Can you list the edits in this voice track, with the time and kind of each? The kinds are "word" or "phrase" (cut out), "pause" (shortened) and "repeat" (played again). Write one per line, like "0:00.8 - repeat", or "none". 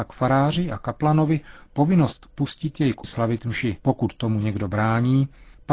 0:03.0 - word
0:03.8 - pause